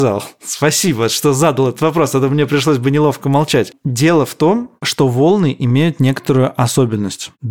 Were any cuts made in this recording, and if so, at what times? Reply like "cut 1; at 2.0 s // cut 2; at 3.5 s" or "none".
none

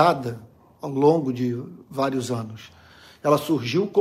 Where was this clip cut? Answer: none

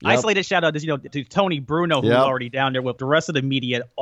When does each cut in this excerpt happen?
cut 1; at 1.1 s // cut 2; at 3.0 s

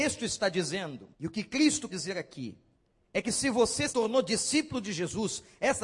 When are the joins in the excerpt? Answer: cut 1; at 1.1 s // cut 2; at 1.9 s // cut 3; at 2.7 s // cut 4; at 3.9 s

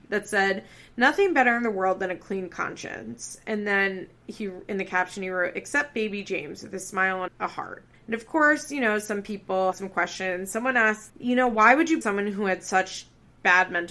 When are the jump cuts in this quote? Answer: cut 1; at 7.3 s // cut 2; at 7.9 s // cut 3; at 9.7 s // cut 4; at 11.1 s // cut 5; at 12.0 s

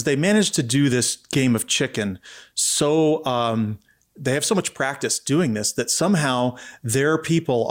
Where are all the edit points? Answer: none

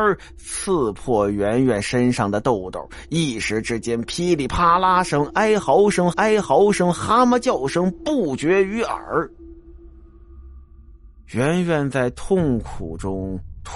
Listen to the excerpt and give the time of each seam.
cut 1; at 6.1 s

